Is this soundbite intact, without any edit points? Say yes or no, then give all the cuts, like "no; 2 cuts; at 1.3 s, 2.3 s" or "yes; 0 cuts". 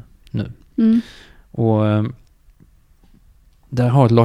yes; 0 cuts